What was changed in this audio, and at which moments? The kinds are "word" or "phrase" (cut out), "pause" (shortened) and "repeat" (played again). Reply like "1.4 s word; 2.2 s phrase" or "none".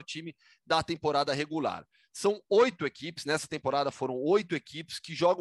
none